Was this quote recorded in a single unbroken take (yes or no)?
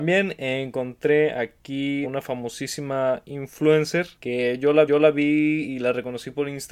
no